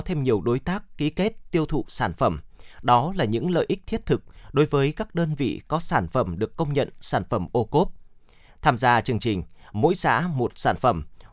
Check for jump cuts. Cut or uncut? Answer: uncut